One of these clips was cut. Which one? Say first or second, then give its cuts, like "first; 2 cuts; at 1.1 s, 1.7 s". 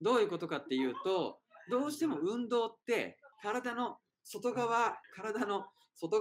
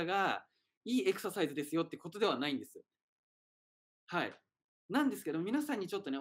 first; 2 cuts; at 3.3 s, 5.0 s